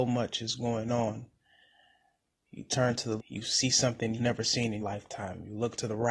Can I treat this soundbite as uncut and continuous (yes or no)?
no